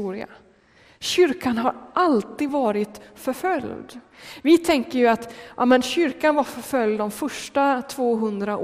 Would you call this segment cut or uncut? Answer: uncut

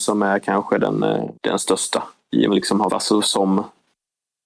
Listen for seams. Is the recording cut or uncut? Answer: cut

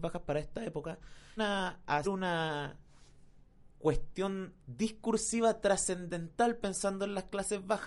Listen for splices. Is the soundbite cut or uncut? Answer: cut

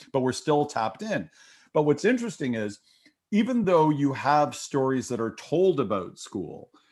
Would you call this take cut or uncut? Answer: uncut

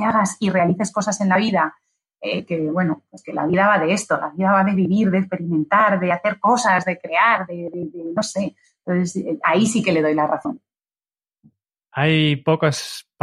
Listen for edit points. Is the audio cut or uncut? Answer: uncut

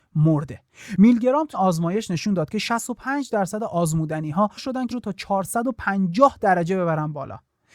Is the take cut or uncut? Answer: cut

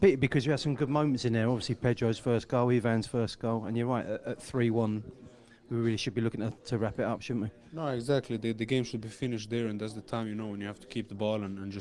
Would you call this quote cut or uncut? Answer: uncut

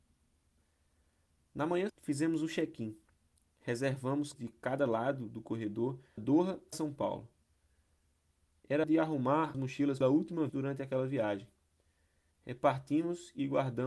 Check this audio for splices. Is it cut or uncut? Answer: cut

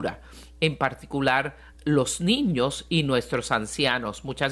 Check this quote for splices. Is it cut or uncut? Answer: uncut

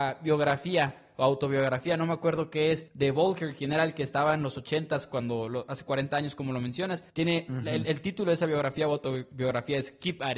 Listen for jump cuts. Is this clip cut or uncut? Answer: cut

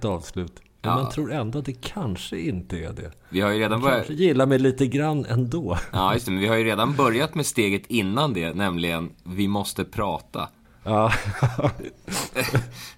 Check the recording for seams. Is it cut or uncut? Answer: uncut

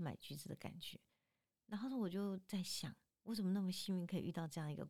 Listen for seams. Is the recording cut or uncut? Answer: uncut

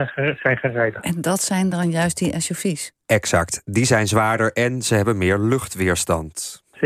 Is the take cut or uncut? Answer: uncut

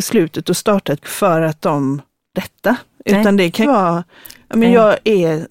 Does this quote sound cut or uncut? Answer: cut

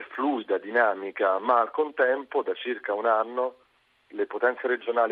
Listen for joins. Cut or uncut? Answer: uncut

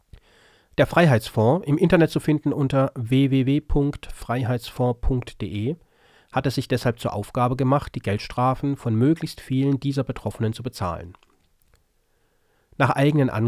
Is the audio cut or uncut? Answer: uncut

